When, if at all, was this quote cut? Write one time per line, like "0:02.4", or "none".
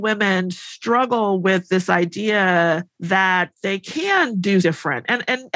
0:02.9
0:04.6